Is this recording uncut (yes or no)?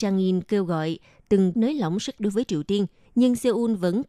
no